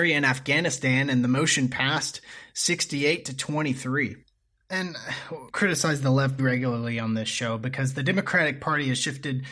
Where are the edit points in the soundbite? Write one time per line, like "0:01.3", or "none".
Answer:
0:05.5
0:06.4